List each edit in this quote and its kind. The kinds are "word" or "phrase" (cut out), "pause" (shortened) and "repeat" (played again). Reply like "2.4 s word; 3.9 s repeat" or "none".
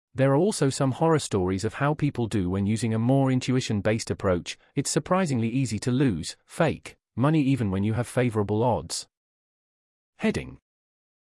none

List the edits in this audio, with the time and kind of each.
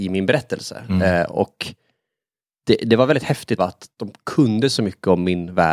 3.6 s phrase

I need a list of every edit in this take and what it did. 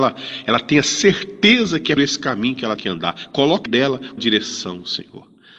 2.0 s word; 2.8 s word; 3.7 s word; 4.2 s word

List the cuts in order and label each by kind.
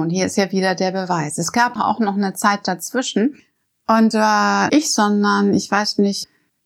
1.8 s word; 4.1 s word; 4.7 s word

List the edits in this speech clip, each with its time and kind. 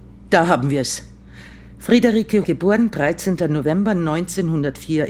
2.4 s word

